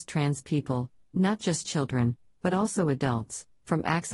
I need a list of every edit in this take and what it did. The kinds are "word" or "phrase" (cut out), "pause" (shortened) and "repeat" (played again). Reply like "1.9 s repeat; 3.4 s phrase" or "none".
none